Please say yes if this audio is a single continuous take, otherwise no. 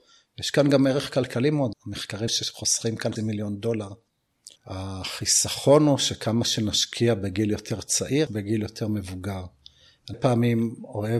no